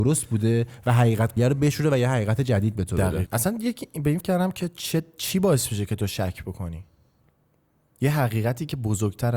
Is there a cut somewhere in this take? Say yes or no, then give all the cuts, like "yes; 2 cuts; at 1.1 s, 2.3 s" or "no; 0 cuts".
yes; 3 cuts; at 1.4 s, 3.3 s, 4.2 s